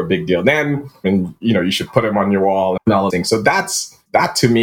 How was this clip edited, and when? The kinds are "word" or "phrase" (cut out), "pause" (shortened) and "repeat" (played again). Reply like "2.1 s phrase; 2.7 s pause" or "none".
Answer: 2.8 s word; 3.1 s word